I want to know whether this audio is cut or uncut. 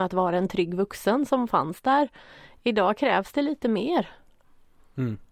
uncut